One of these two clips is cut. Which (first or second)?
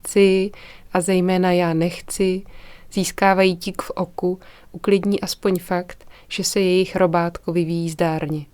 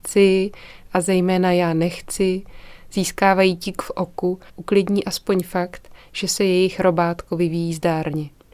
second